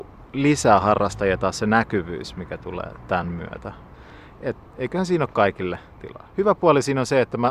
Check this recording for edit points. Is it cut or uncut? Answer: uncut